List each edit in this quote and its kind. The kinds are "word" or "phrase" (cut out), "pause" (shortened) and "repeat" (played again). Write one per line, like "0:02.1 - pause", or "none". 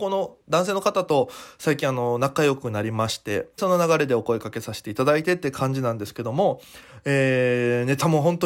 0:03.6 - word

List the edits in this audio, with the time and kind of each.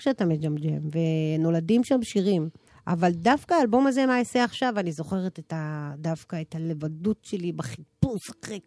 0:02.7 - pause

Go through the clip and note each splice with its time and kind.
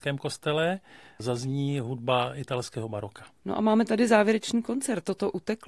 0:01.2 - word
0:03.4 - pause

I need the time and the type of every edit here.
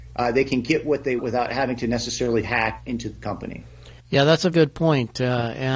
0:01.2 - word
0:02.4 - word
0:04.0 - pause
0:04.5 - word

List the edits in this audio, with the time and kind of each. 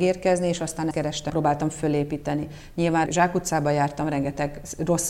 0:00.9 - word
0:01.3 - phrase
0:03.1 - word

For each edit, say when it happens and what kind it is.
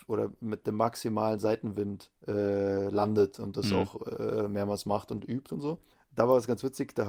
0:02.2 - pause
0:05.9 - pause

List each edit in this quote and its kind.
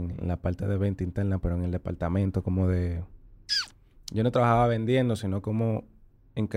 none

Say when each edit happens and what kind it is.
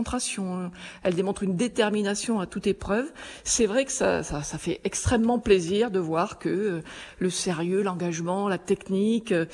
none

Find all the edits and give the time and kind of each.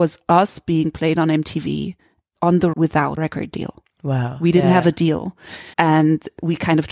0:02.4 - word
0:02.7 - word
0:03.2 - phrase
0:05.7 - pause

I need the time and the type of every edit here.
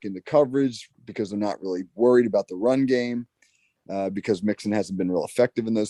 none

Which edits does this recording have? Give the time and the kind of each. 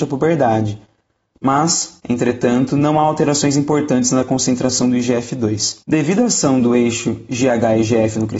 0:05.8 - pause

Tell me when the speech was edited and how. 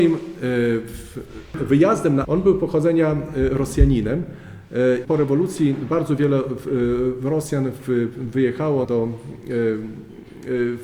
0:02.2 - word
0:05.0 - word
0:08.8 - word

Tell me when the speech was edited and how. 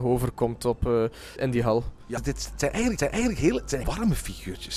0:01.4 - word
0:02.2 - phrase
0:03.0 - repeat
0:03.8 - word

